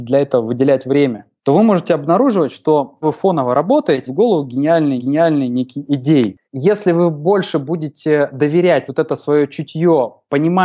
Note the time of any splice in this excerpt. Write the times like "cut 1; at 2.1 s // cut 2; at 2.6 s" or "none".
cut 1; at 1.4 s // cut 2; at 3.0 s // cut 3; at 4.1 s // cut 4; at 5.0 s // cut 5; at 6.4 s // cut 6; at 8.9 s